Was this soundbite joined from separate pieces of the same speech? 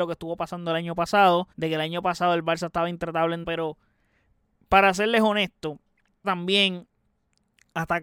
yes; 3 cuts; at 1.5 s, 3.4 s, 6.2 s

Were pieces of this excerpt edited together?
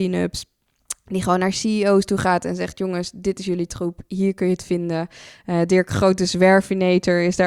no; 0 cuts

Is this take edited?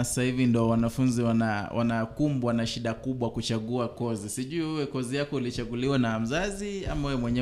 no; 0 cuts

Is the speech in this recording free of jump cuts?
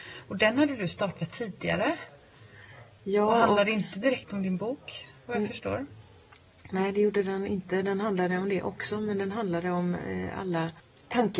yes; 0 cuts

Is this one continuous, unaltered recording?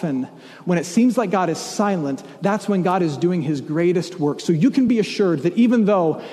yes; 0 cuts

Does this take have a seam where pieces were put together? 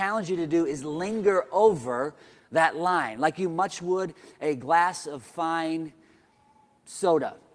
no; 0 cuts

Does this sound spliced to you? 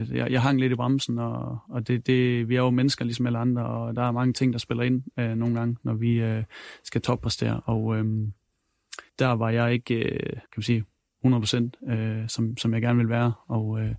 yes; 2 cuts; at 9.1 s, 10.5 s

